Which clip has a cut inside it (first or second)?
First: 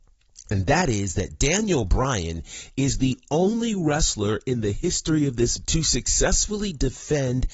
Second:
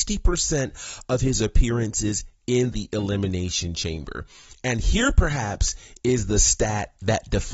first